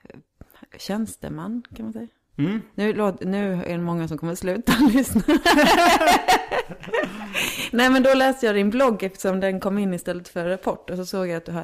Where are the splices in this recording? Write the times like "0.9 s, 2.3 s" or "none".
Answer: none